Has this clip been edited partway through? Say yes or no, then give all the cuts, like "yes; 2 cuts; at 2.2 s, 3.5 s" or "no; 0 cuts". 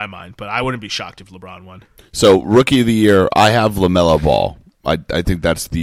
no; 0 cuts